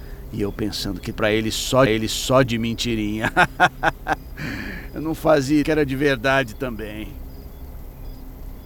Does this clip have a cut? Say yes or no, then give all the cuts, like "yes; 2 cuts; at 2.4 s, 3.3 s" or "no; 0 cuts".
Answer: yes; 3 cuts; at 1.1 s, 1.9 s, 5.6 s